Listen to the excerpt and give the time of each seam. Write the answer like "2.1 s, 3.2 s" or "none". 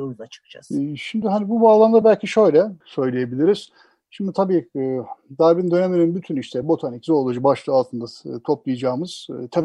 none